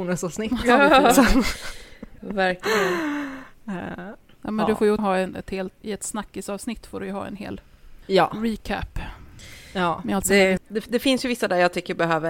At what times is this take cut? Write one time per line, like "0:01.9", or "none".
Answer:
0:02.2
0:05.0
0:05.8
0:08.0
0:10.6